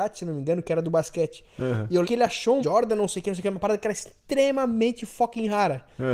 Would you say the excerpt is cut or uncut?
cut